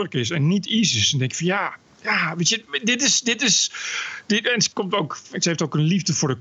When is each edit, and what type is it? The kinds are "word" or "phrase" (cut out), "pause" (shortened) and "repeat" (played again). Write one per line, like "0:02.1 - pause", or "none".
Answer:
0:01.9 - pause